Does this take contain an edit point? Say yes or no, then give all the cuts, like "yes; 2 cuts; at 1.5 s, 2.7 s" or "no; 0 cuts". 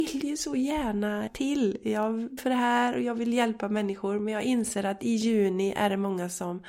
yes; 2 cuts; at 1.3 s, 2.4 s